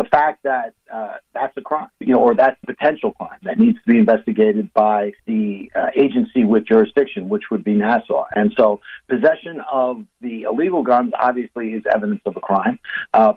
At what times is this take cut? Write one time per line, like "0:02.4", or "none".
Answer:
0:02.0
0:02.6
0:05.2